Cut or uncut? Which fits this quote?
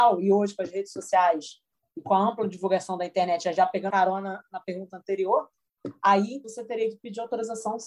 cut